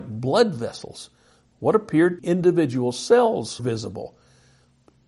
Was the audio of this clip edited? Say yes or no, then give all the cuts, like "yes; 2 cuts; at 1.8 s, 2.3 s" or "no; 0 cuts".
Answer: yes; 2 cuts; at 2.2 s, 3.6 s